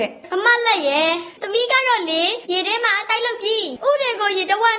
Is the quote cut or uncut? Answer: cut